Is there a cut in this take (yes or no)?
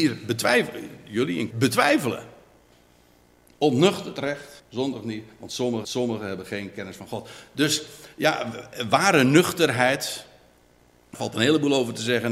yes